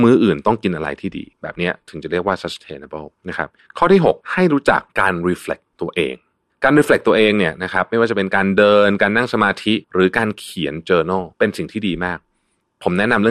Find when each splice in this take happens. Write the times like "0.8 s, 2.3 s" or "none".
1.3 s, 3.2 s, 3.6 s, 4.2 s, 4.9 s, 5.7 s, 6.5 s, 9.8 s, 11.3 s